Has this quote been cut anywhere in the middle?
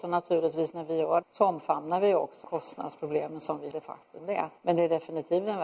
yes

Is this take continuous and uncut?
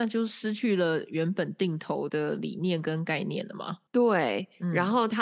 no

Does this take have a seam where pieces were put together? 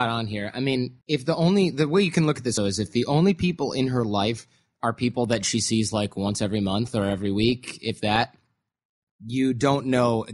yes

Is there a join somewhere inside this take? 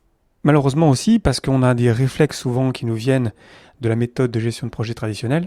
no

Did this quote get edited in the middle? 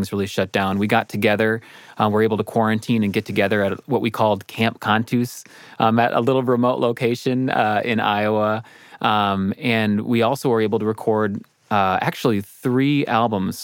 no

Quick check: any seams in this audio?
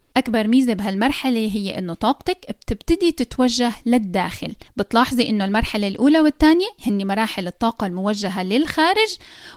no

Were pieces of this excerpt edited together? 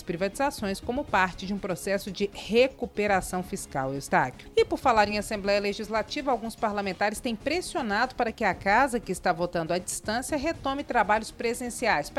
no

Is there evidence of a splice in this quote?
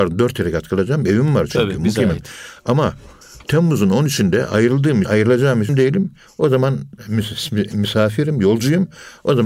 yes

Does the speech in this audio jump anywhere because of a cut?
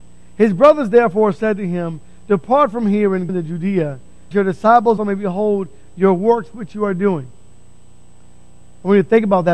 yes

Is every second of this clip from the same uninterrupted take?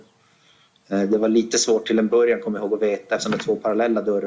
yes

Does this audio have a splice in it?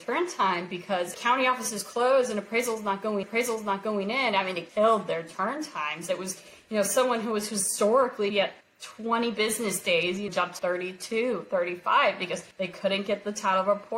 yes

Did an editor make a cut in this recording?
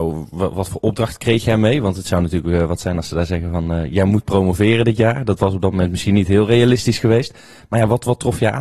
no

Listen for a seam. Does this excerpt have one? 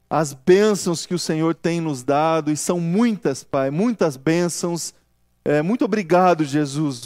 no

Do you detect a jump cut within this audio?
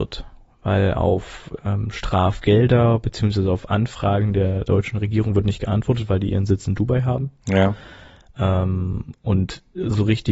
no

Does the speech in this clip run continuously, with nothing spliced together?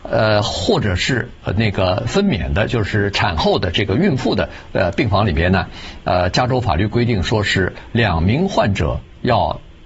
yes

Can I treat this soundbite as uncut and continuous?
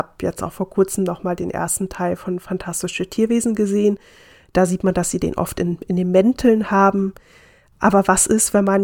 yes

